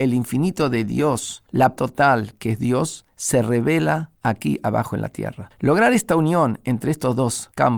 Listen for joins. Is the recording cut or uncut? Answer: cut